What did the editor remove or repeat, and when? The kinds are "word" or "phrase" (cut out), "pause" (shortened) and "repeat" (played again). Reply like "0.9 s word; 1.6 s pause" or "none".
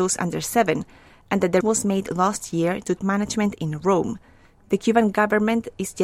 1.6 s word; 3.0 s word